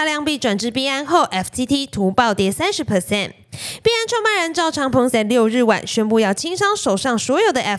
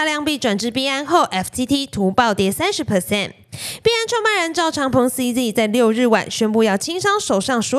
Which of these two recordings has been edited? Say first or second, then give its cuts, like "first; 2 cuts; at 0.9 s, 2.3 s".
first; 1 cut; at 5.1 s